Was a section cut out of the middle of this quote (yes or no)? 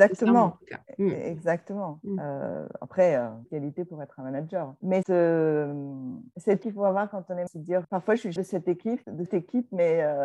yes